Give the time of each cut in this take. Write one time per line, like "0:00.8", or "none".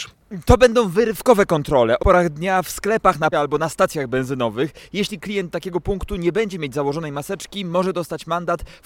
0:02.0
0:03.3